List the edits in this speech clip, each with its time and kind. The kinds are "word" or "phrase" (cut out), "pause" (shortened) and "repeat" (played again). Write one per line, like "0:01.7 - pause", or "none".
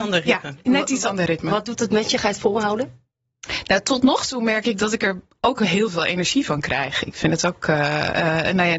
none